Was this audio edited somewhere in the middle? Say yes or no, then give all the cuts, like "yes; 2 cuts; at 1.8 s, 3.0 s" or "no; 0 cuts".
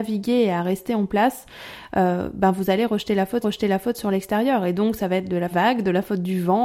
yes; 2 cuts; at 3.4 s, 5.5 s